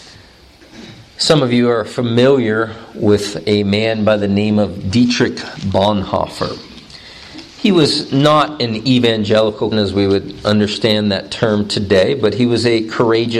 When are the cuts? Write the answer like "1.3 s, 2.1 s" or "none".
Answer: 9.7 s